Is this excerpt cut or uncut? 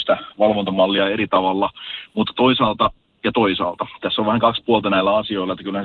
uncut